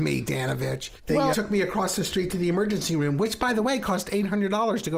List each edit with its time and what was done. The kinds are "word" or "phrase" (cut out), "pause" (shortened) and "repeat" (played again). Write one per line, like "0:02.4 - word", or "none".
0:01.3 - word